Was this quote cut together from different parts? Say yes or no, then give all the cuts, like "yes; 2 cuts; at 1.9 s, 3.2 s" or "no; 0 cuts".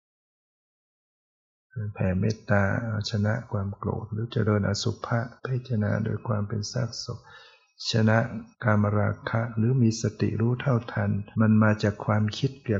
yes; 3 cuts; at 5.4 s, 8.5 s, 11.3 s